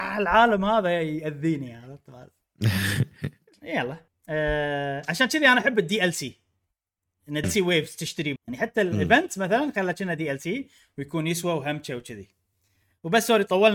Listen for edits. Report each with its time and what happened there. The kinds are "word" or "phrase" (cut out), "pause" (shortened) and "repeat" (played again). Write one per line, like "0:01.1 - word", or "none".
0:04.1 - pause
0:07.4 - word
0:08.4 - word